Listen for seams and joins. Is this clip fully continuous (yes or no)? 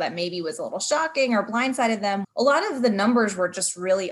no